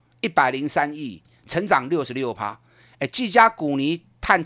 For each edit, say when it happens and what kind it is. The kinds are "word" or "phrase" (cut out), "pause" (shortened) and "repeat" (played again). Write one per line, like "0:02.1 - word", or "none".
none